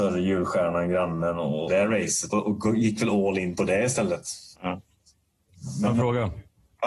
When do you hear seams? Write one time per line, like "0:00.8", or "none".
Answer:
0:01.7
0:02.3
0:04.5